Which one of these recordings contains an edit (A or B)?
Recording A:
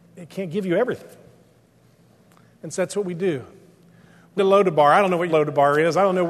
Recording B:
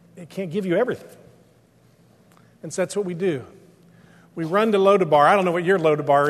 A